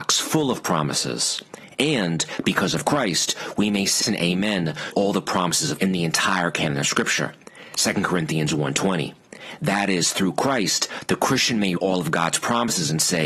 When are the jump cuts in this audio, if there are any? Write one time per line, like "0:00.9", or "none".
0:04.0
0:04.9
0:05.8
0:11.8